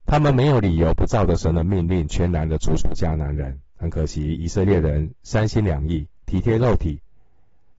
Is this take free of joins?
no; 1 cut; at 3.7 s

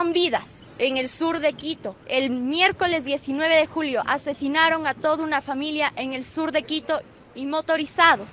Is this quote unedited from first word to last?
no; 1 cut; at 2.0 s

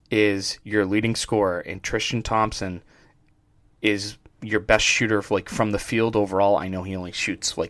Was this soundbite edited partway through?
no; 0 cuts

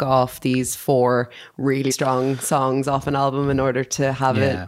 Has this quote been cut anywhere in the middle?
yes; 1 cut; at 1.9 s

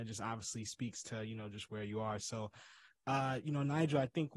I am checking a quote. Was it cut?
no; 0 cuts

